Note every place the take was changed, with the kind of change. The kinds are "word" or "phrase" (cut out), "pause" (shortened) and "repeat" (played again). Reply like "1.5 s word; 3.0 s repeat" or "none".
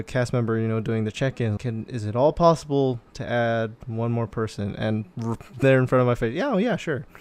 1.6 s word; 5.6 s phrase